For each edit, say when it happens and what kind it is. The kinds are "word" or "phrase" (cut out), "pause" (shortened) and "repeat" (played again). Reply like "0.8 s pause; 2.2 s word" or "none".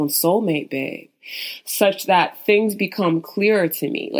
none